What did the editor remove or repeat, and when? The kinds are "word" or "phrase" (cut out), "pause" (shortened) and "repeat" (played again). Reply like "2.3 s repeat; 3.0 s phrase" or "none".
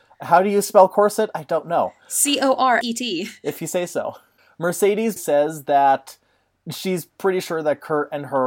2.8 s word; 5.2 s word